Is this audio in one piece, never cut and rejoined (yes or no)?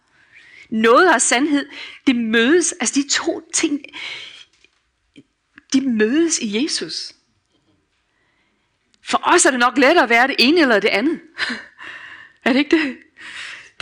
yes